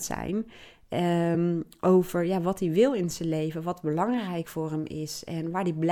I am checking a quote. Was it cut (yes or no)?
no